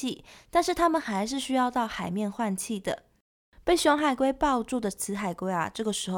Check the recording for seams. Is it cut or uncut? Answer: uncut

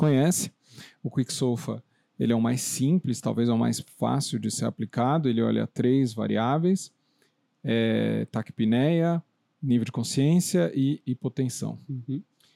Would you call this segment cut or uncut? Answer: uncut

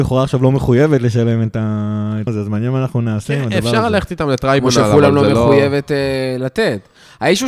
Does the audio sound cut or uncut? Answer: cut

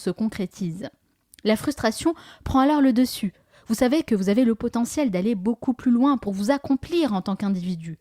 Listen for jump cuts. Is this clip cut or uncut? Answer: uncut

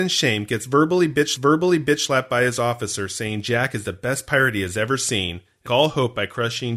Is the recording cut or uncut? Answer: cut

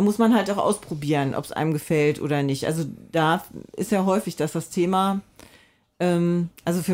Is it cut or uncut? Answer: uncut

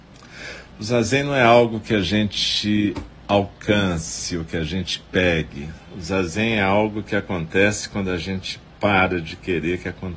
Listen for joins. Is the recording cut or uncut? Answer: uncut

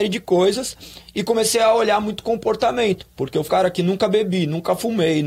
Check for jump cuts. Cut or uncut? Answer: cut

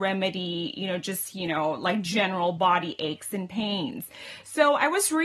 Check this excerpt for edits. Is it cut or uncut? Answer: uncut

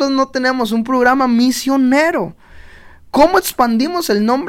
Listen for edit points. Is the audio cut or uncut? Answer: uncut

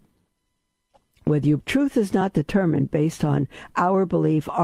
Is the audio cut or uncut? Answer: cut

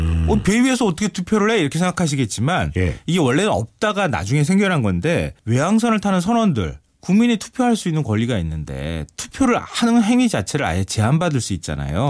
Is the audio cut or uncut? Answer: cut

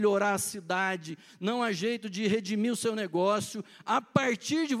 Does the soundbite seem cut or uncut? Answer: uncut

